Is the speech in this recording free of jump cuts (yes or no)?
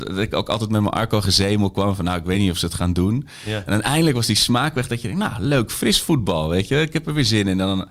yes